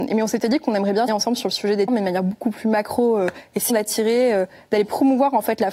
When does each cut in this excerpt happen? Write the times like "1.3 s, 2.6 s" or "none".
1.1 s, 1.9 s, 3.7 s